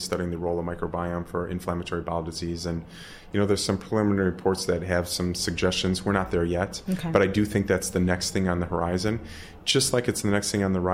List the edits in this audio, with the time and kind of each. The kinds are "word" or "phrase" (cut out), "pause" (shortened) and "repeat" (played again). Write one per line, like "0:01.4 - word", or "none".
none